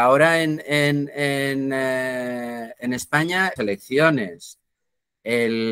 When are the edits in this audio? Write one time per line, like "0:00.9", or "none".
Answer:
0:03.6